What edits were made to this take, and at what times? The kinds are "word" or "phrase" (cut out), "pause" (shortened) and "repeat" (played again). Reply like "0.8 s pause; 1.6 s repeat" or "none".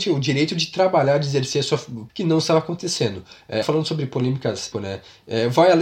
2.1 s word; 3.6 s word; 4.7 s word